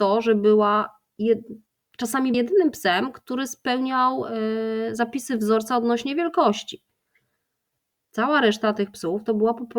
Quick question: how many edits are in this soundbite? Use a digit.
1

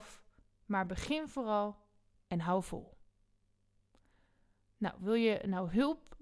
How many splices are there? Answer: 0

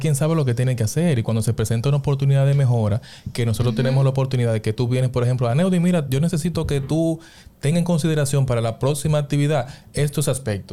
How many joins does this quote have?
0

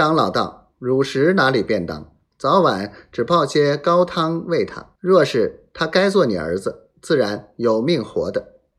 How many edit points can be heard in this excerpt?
1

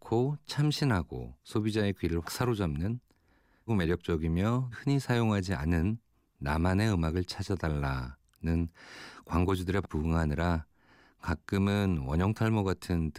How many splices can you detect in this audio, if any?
5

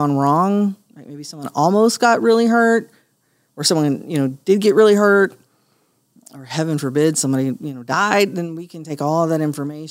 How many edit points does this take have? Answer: 0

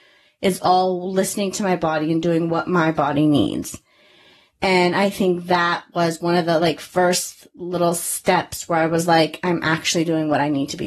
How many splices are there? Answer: 0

